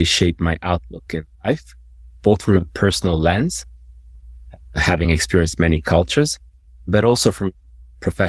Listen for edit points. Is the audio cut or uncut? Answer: uncut